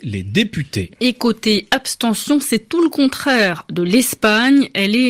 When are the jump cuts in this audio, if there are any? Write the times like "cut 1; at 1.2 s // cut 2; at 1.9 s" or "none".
none